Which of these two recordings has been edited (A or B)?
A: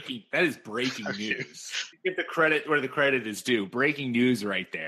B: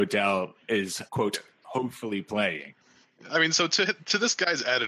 B